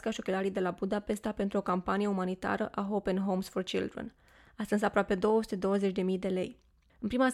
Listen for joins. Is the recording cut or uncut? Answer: uncut